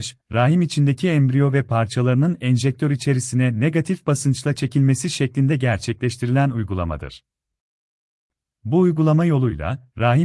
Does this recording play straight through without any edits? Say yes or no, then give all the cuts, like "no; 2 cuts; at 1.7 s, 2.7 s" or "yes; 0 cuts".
yes; 0 cuts